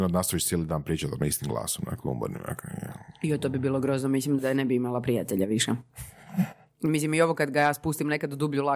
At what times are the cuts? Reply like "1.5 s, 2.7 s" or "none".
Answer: 4.4 s